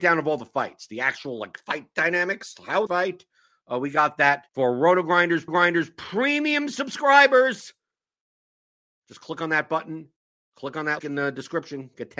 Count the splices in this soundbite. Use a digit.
4